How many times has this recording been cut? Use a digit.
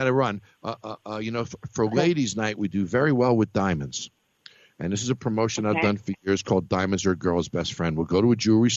0